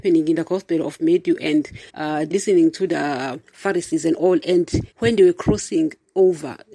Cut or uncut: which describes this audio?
cut